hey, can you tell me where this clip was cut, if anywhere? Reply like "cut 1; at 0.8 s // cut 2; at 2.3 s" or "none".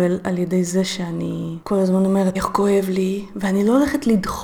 cut 1; at 2.3 s